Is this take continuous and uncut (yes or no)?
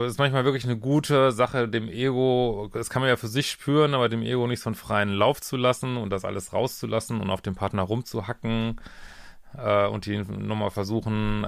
yes